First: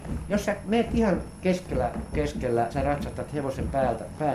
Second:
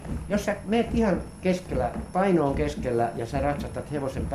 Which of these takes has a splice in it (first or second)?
first